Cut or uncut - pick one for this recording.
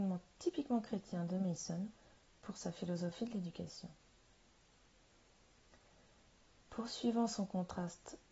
uncut